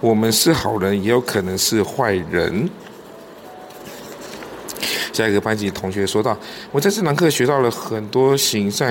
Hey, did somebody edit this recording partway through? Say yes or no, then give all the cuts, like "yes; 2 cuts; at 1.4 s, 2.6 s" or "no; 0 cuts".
no; 0 cuts